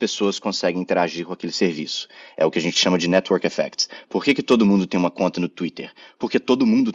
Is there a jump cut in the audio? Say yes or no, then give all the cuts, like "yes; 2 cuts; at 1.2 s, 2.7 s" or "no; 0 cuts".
no; 0 cuts